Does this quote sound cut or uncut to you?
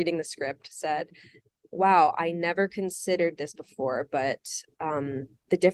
uncut